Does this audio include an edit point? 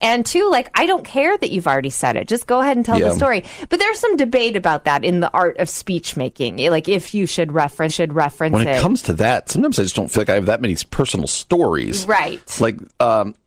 yes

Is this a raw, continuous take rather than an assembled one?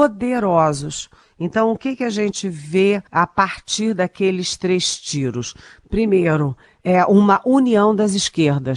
no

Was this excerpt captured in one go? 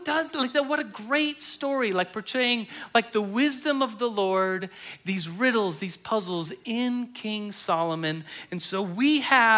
yes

